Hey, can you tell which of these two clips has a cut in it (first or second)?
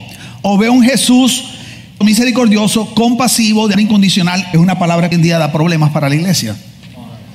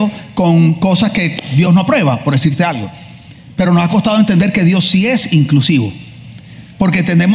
first